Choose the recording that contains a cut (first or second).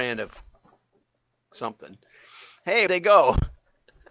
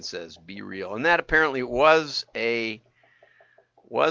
first